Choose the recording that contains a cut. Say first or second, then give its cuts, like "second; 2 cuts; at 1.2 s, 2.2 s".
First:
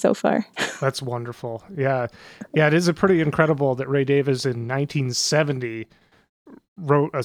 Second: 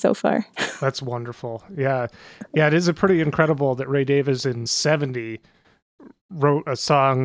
second; 1 cut; at 4.7 s